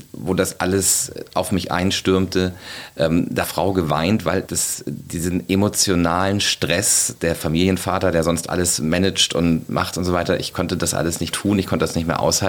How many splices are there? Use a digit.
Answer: 3